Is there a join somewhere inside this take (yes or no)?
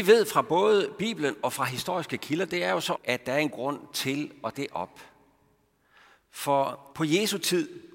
yes